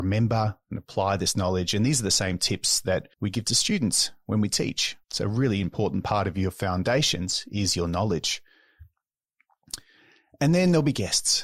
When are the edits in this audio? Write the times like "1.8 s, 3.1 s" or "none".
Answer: 3.1 s, 5.0 s